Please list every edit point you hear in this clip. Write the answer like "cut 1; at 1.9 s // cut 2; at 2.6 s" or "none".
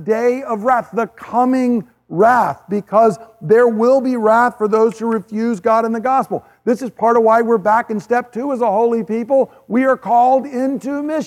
none